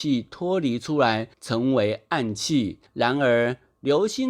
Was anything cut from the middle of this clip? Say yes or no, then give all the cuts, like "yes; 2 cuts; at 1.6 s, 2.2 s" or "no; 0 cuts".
yes; 2 cuts; at 1.3 s, 2.9 s